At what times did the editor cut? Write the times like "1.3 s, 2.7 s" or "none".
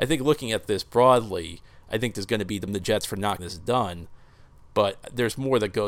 2.1 s, 2.7 s, 3.4 s